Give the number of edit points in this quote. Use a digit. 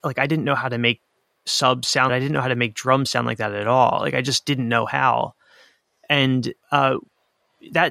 2